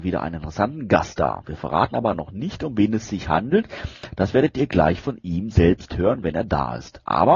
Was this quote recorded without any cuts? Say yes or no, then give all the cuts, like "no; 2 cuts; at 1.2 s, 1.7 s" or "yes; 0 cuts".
yes; 0 cuts